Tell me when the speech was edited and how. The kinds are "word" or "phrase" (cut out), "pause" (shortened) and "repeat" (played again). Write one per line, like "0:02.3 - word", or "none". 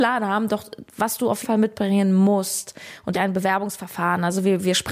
0:01.4 - word
0:03.1 - phrase